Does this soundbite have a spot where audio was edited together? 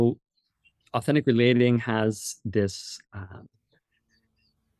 no; 0 cuts

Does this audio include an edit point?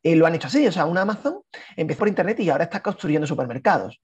yes; 1 cut; at 2.0 s

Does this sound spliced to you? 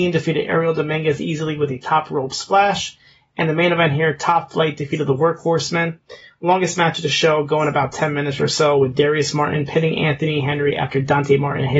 no; 0 cuts

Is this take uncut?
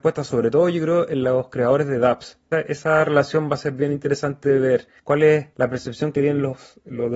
no; 3 cuts; at 2.5 s, 5.0 s, 5.5 s

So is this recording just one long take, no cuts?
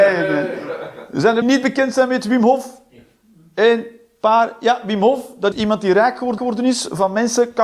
no; 3 cuts; at 1.4 s, 5.5 s, 6.4 s

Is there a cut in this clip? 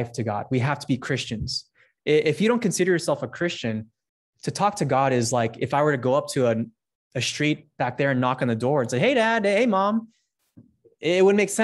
no; 0 cuts

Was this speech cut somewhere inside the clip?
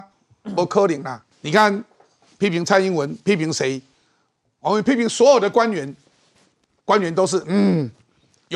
yes; 1 cut; at 1.3 s

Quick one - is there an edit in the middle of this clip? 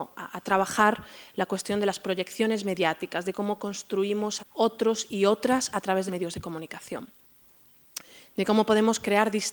yes; 2 cuts; at 4.4 s, 6.1 s

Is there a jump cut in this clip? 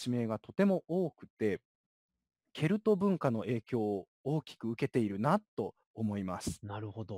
no; 0 cuts

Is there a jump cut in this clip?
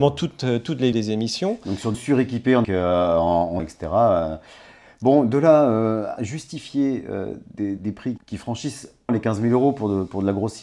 yes; 8 cuts; at 0.9 s, 1.9 s, 2.6 s, 3.6 s, 6.2 s, 7.8 s, 8.2 s, 9.1 s

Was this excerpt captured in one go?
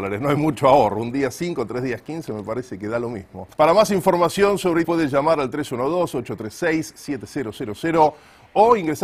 no; 2 cuts; at 3.5 s, 4.8 s

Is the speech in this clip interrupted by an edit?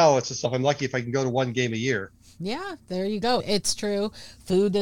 no; 0 cuts

